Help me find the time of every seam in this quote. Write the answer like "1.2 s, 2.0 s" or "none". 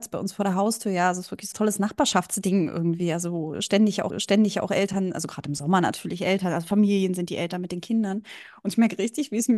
1.5 s, 4.1 s